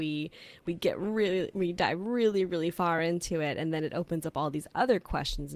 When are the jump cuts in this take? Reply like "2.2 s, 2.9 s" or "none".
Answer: none